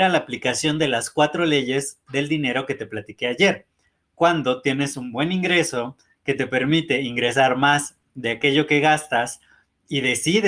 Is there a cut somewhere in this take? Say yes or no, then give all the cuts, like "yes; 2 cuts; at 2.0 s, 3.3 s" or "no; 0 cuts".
no; 0 cuts